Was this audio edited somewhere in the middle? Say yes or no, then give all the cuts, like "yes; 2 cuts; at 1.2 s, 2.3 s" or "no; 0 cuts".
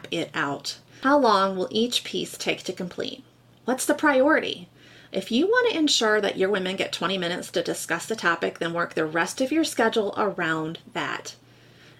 no; 0 cuts